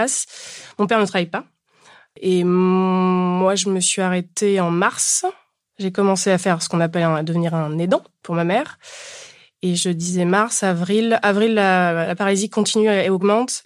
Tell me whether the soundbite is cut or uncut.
uncut